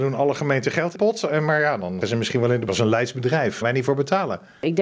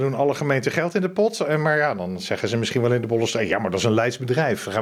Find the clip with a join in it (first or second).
first